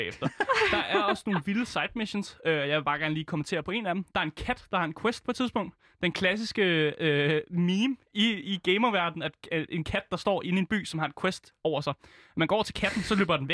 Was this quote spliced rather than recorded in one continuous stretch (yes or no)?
no